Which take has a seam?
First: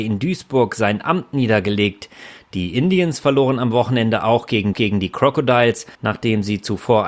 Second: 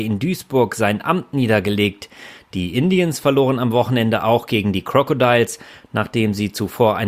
first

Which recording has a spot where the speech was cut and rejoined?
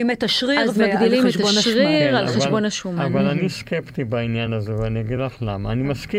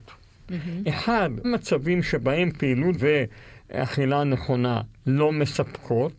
second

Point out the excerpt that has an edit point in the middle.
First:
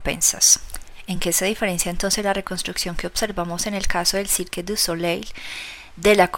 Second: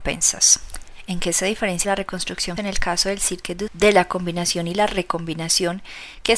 second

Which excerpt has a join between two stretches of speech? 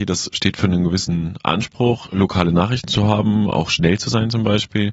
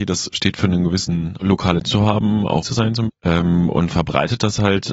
second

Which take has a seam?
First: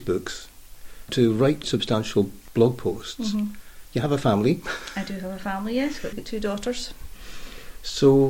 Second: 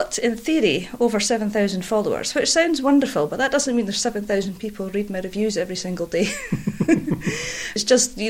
first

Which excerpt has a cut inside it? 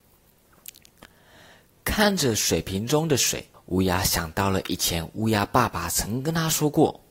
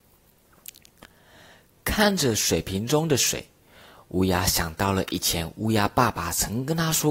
first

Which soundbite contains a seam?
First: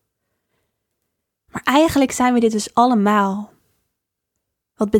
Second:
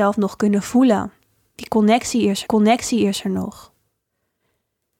second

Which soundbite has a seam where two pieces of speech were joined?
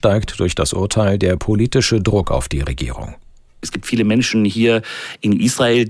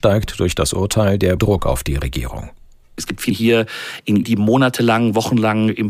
second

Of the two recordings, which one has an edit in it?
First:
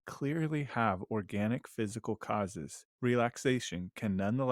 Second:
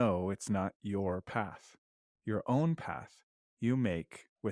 first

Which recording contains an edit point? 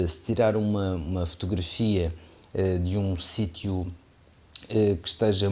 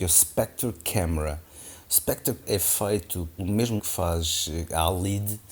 second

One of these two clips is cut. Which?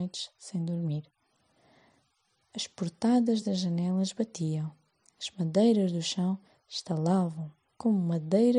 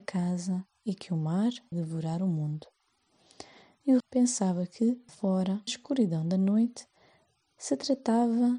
second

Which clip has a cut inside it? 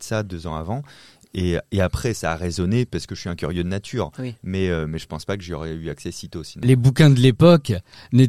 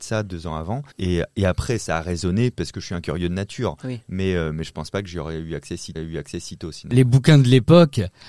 second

